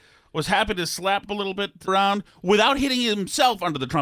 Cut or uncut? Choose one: cut